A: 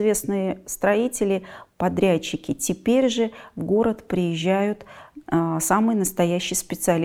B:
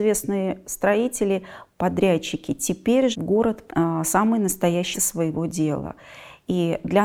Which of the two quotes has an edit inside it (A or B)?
B